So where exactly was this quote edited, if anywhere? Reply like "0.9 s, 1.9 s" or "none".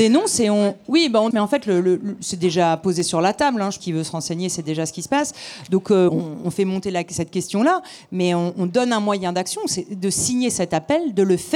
1.3 s, 3.8 s, 6.1 s, 8.5 s